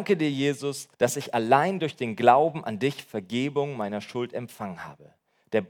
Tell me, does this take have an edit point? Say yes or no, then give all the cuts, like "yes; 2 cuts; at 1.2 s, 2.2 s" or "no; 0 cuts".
yes; 1 cut; at 0.9 s